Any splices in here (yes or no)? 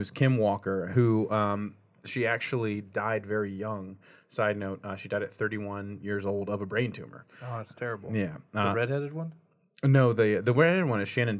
no